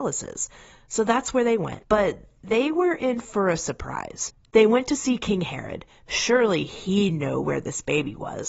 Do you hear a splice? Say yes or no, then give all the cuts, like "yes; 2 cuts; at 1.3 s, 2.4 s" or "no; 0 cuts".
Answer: no; 0 cuts